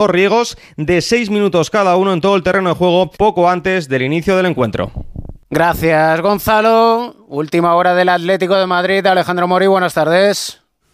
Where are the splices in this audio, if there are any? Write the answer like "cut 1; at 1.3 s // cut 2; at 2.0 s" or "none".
cut 1; at 3.2 s // cut 2; at 5.4 s